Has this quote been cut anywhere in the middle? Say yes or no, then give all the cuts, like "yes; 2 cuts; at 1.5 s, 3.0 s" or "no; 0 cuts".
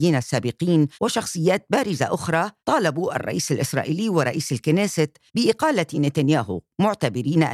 yes; 3 cuts; at 0.9 s, 2.6 s, 5.3 s